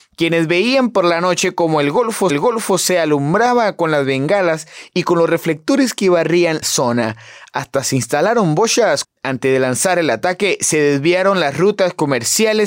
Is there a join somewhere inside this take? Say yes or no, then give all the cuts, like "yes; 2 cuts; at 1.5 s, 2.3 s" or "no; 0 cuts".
yes; 3 cuts; at 2.3 s, 6.6 s, 9.0 s